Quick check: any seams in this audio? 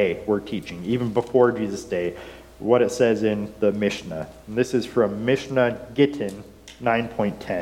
no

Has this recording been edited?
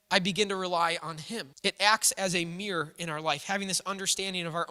yes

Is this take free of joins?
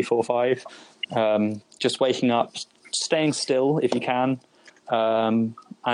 yes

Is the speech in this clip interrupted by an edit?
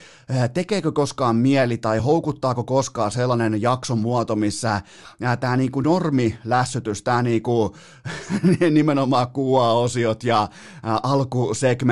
no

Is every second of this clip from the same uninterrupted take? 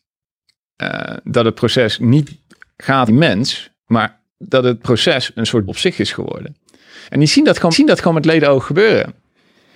no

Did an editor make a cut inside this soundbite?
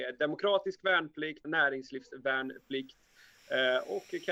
yes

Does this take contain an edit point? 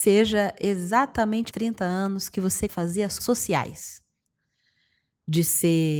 yes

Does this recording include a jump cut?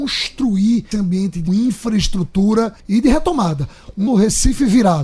yes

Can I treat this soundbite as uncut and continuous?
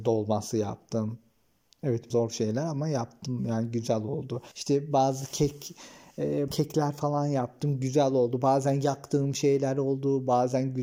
no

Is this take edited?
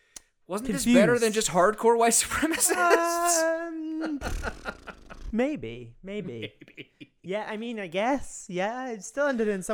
no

